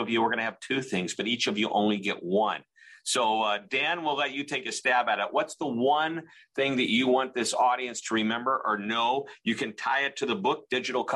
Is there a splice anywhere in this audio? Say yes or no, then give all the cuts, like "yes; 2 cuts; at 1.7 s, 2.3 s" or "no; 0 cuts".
no; 0 cuts